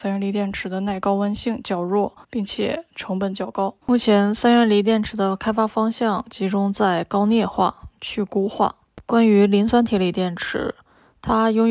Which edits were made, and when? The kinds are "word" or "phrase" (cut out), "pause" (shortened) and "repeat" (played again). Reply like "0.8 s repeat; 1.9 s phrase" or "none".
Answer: 2.2 s pause; 3.8 s pause